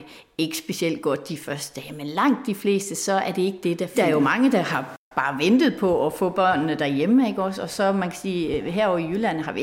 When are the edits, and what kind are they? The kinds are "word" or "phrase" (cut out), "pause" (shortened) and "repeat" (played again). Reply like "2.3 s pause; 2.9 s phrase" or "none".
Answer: 5.0 s pause

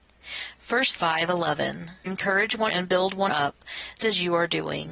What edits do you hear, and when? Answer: 1.0 s word; 2.1 s word; 2.7 s word; 3.3 s word; 4.0 s word

